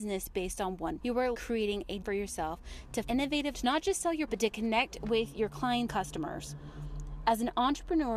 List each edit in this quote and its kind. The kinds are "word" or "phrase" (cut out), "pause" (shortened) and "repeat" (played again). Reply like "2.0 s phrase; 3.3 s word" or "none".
1.0 s word; 1.3 s word; 2.0 s word; 3.0 s word; 3.5 s word; 4.3 s word; 5.9 s word